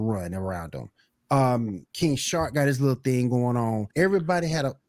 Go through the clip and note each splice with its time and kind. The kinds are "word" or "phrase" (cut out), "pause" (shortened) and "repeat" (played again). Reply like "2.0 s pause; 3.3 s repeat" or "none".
1.9 s pause; 3.9 s pause

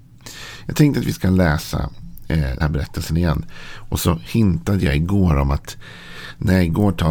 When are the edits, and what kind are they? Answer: 2.6 s word

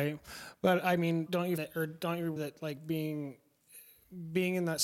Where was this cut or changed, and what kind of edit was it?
1.3 s word; 1.6 s word; 2.4 s word

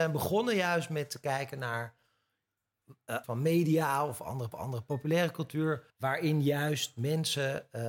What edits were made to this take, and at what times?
3.2 s phrase; 4.5 s repeat; 5.9 s pause

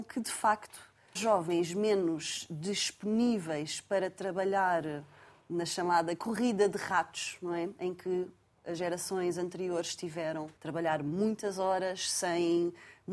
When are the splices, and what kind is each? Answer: 1.2 s word; 10.6 s pause

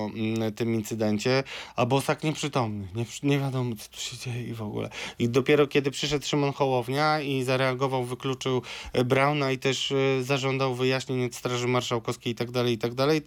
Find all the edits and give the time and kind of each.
none

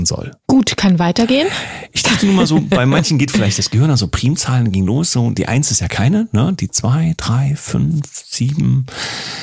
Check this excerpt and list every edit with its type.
none

